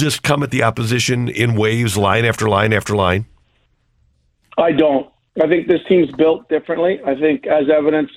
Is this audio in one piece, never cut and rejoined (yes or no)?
yes